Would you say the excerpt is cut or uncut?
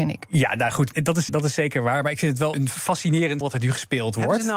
cut